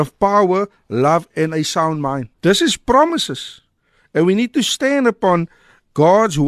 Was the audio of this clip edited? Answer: yes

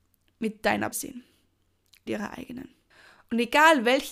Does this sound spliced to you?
yes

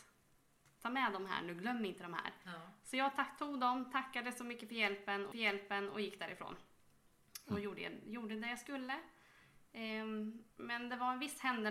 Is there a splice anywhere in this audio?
yes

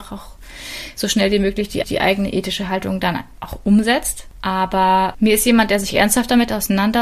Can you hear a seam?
yes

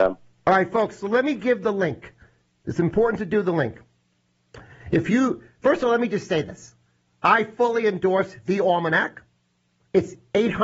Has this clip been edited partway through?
no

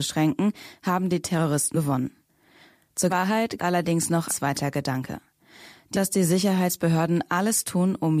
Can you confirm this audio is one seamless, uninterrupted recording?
no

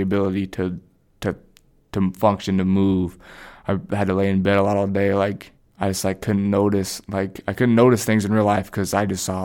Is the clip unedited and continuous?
no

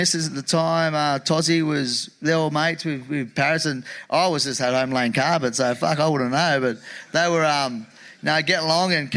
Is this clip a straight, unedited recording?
yes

